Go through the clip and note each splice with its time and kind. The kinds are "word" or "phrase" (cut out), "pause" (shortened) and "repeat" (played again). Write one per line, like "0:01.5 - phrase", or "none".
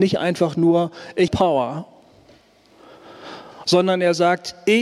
0:01.3 - word